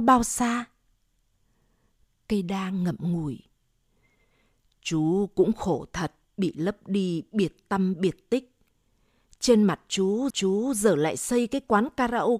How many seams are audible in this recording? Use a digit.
2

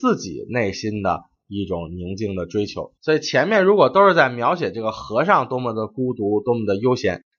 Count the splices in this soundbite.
1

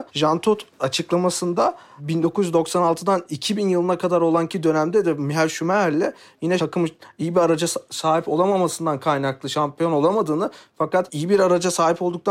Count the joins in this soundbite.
0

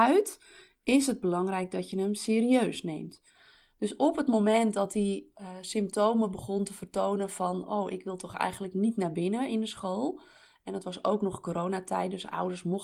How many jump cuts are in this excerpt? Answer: 0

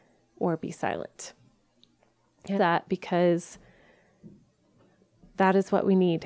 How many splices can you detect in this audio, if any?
1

